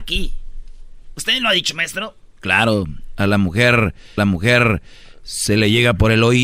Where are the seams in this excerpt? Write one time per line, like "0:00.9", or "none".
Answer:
0:04.2

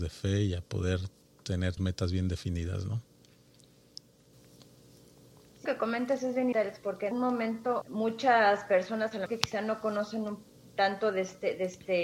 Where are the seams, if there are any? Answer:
0:01.8
0:05.7
0:06.5
0:07.1
0:07.8
0:09.3

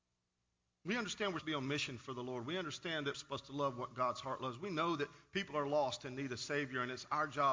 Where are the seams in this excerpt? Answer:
0:01.4
0:03.1

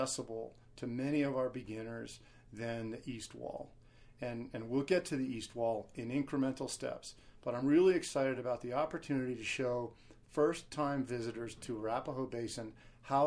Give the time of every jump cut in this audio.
none

